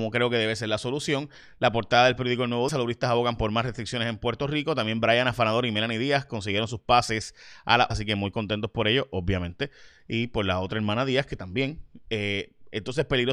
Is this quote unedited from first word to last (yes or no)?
no